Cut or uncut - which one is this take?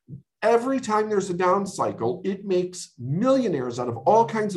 uncut